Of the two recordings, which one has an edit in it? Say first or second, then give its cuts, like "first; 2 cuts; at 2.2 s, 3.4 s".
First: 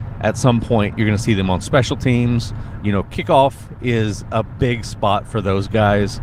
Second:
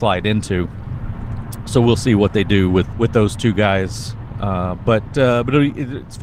second; 1 cut; at 2.9 s